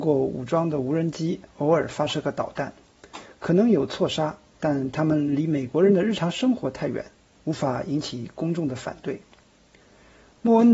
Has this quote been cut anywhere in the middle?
yes; 2 cuts; at 4.5 s, 7.1 s

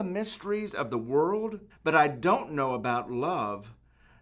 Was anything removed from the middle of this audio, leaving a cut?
yes; 1 cut; at 1.7 s

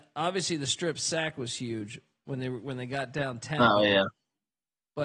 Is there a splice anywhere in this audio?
no; 0 cuts

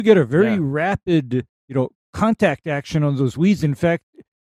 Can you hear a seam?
yes; 1 cut; at 1.5 s

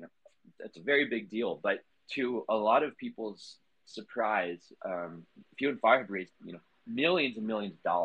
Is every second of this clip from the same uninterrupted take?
no; 2 cuts; at 1.9 s, 6.4 s

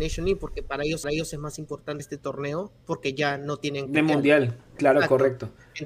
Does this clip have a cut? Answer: yes; 4 cuts; at 1.0 s, 2.0 s, 2.8 s, 3.9 s

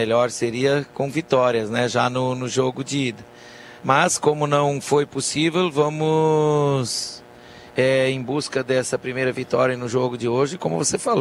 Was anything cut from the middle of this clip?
yes; 2 cuts; at 3.8 s, 7.7 s

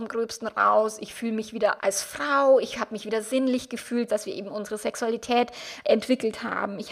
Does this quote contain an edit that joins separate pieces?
yes; 3 cuts; at 1.8 s, 4.1 s, 5.8 s

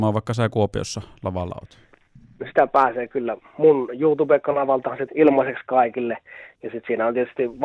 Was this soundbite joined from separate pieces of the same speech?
yes; 1 cut; at 5.1 s

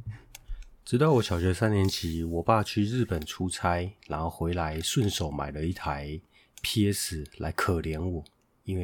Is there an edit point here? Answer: no; 0 cuts

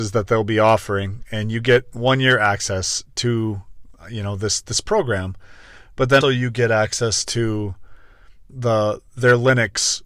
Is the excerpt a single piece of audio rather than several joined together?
no; 2 cuts; at 6.2 s, 8.5 s

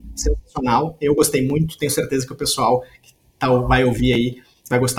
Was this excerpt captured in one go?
yes; 0 cuts

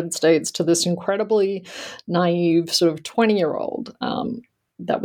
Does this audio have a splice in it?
no; 0 cuts

